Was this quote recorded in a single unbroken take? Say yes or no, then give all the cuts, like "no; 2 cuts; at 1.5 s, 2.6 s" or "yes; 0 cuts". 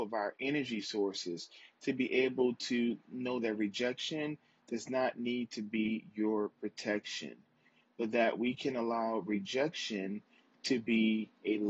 yes; 0 cuts